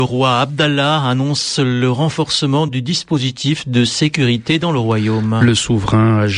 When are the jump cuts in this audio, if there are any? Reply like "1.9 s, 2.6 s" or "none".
none